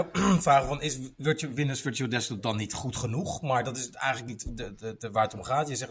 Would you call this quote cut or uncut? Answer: uncut